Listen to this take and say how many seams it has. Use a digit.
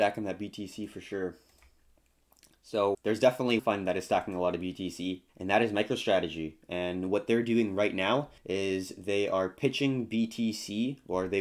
4